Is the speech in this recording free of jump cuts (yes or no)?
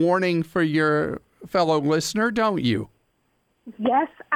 yes